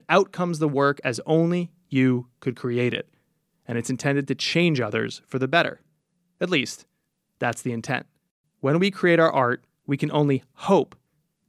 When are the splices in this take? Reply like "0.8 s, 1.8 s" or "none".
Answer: none